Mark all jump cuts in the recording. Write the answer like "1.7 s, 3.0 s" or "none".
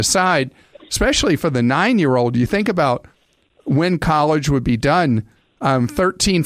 none